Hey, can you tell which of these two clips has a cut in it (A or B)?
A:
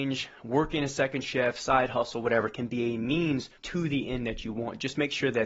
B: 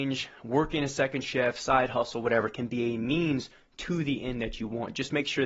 A